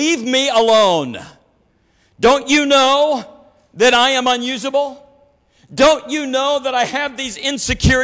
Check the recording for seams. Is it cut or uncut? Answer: uncut